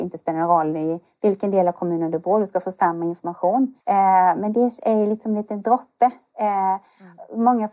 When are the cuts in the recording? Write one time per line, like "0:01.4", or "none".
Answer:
0:03.8